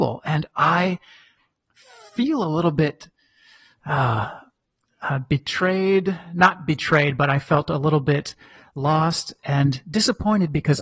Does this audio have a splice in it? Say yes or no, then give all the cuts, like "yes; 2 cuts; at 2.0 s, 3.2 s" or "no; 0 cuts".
no; 0 cuts